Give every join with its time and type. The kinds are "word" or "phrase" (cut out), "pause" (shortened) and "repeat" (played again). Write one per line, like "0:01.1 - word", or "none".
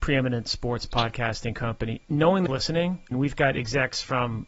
0:02.0 - word
0:02.5 - word
0:03.1 - word